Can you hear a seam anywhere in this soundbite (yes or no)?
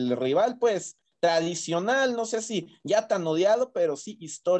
no